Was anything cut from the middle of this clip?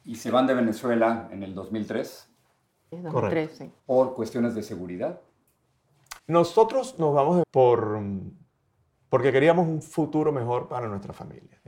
yes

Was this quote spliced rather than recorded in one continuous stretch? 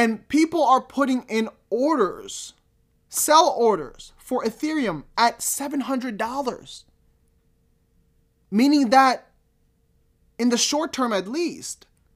no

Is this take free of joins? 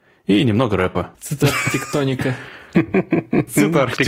no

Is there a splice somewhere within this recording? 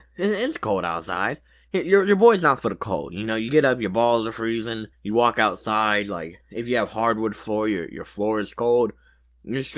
yes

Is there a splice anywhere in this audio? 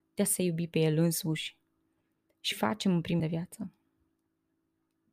yes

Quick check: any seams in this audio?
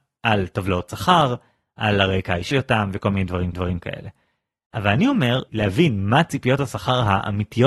yes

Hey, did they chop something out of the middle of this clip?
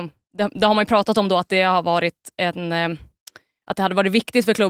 no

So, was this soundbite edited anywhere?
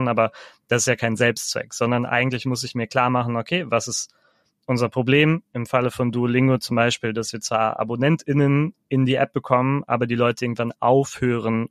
no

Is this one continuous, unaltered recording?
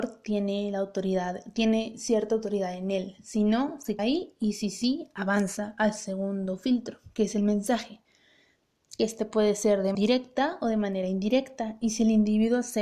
no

